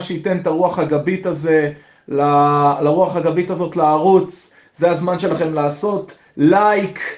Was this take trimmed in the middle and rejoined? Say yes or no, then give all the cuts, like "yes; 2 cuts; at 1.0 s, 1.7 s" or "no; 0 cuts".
no; 0 cuts